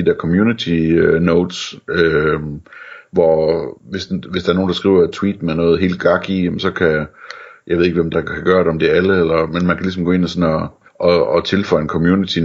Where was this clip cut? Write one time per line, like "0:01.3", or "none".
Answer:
0:03.8
0:08.1
0:10.9

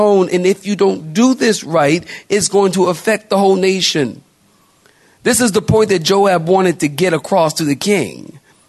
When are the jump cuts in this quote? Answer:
none

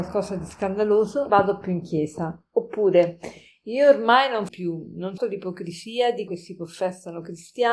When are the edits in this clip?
0:01.3
0:04.5
0:05.2
0:06.3

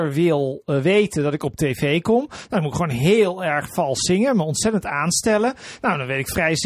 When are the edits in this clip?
none

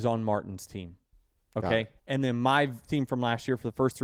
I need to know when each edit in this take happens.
0:02.0
0:02.9

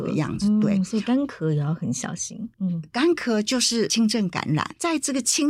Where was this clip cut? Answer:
0:02.5

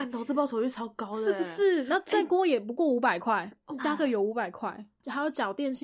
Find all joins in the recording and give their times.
0:03.8

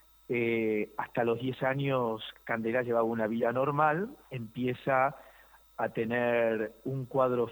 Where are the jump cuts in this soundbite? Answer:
none

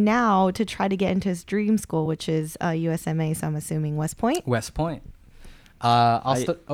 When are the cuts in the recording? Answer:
none

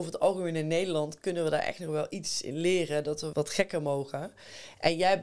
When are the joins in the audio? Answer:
0:03.3

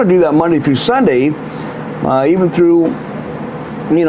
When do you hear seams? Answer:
none

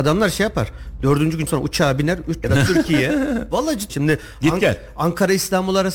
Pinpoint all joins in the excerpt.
0:01.5
0:02.4
0:03.9

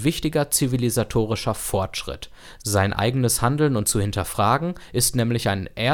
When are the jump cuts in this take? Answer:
0:03.8

